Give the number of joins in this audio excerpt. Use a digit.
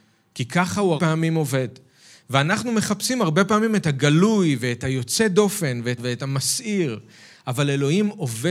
2